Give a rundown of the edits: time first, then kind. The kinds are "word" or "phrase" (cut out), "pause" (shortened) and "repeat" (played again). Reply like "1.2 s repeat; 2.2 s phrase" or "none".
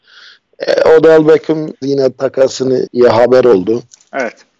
1.8 s word; 2.9 s word